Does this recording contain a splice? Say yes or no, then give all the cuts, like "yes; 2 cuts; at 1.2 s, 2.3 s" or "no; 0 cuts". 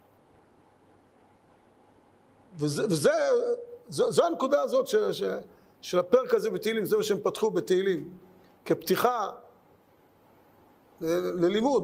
no; 0 cuts